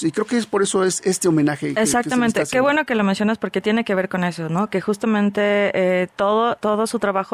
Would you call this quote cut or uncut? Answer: uncut